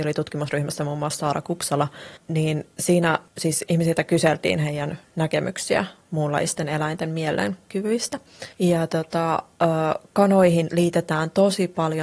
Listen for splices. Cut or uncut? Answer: cut